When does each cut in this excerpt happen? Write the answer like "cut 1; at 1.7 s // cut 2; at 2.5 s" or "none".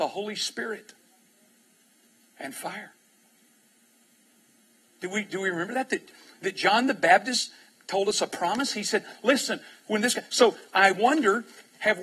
none